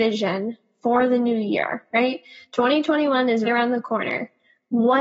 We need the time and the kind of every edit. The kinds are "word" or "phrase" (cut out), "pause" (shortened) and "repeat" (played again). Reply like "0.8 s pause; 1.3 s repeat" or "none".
3.4 s word